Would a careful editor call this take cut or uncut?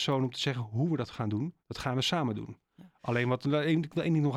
cut